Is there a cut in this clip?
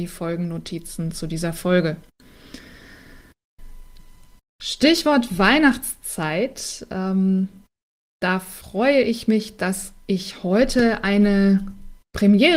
no; 0 cuts

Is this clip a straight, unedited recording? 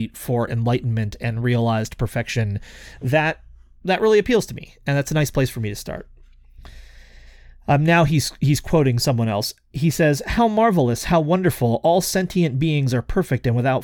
yes; 0 cuts

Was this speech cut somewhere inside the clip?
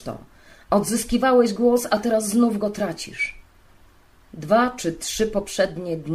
no; 0 cuts

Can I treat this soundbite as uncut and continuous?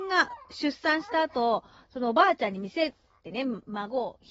yes; 0 cuts

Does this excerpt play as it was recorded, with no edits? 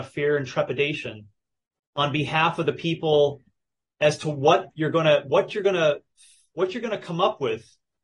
yes; 0 cuts

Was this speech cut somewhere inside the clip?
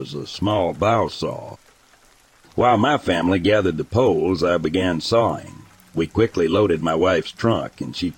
no; 0 cuts

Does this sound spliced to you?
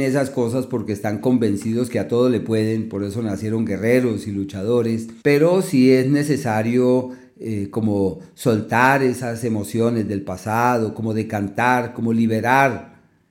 yes; 1 cut; at 5.2 s

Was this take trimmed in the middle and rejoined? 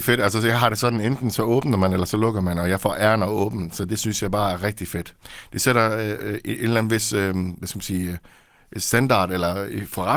no; 0 cuts

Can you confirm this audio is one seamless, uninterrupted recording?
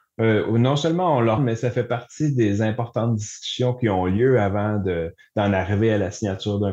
no; 1 cut; at 1.4 s

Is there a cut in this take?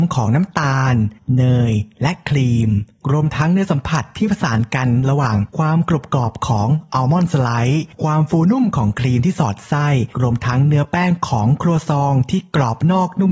yes; 1 cut; at 10.1 s

